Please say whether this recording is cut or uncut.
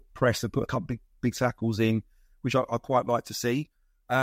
uncut